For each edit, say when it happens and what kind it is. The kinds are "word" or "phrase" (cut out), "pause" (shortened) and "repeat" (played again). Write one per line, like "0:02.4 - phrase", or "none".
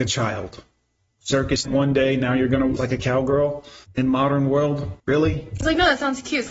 0:01.6 - word
0:02.8 - word
0:03.8 - pause
0:05.0 - pause